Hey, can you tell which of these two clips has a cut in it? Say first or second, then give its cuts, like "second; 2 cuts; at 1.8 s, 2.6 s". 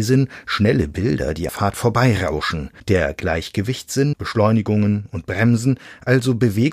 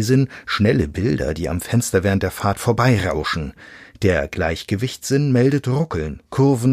first; 3 cuts; at 1.5 s, 2.8 s, 4.1 s